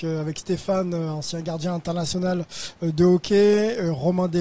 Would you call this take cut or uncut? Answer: uncut